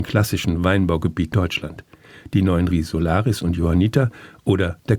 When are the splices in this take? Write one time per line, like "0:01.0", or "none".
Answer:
0:01.3
0:02.7

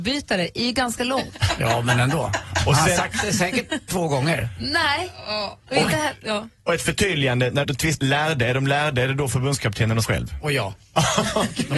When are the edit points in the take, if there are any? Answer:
0:03.9
0:07.6
0:08.0
0:10.0

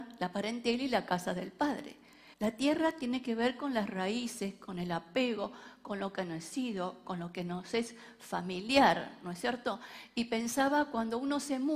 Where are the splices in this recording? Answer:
0:02.3

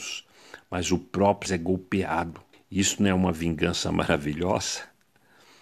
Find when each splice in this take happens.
0:01.5
0:02.5

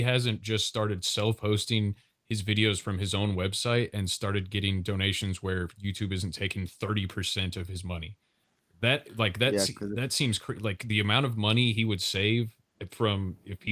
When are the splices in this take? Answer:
none

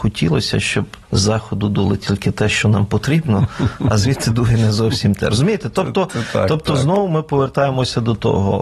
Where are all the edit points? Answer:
0:01.0

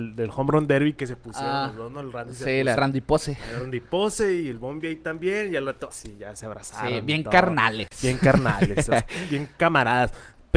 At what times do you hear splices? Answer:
0:02.8
0:05.9

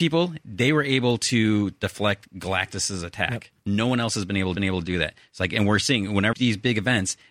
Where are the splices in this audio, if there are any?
0:04.6
0:06.3

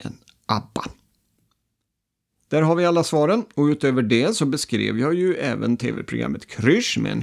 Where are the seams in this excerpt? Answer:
none

